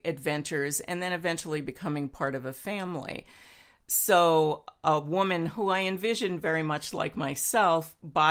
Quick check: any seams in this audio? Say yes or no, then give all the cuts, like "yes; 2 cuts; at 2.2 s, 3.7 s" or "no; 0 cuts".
no; 0 cuts